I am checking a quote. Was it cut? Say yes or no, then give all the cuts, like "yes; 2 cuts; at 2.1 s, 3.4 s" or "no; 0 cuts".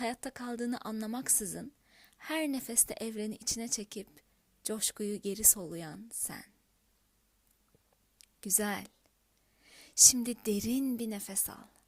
no; 0 cuts